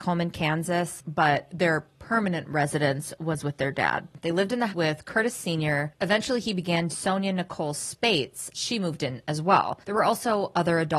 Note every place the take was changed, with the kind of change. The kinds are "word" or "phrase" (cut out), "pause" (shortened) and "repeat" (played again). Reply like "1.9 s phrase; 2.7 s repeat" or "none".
4.7 s word; 6.9 s word; 8.5 s word